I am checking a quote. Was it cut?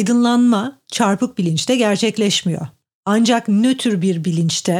no; 0 cuts

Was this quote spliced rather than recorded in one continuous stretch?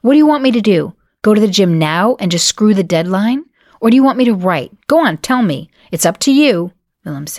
no; 0 cuts

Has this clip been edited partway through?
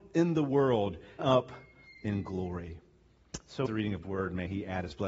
yes; 3 cuts; at 1.2 s, 3.7 s, 4.0 s

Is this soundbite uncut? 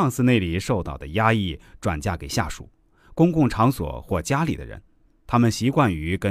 yes; 0 cuts

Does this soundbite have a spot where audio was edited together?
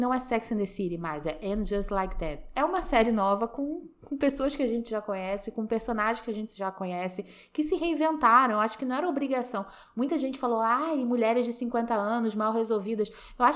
no; 0 cuts

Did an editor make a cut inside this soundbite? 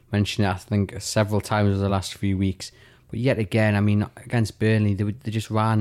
no; 0 cuts

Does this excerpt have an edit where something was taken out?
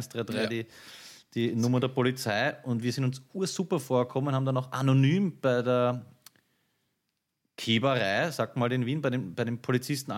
no; 0 cuts

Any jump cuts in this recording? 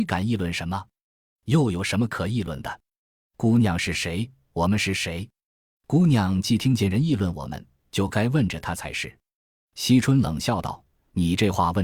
no; 0 cuts

